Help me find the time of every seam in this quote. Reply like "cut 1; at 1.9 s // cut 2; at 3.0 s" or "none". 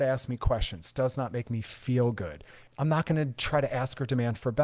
cut 1; at 2.7 s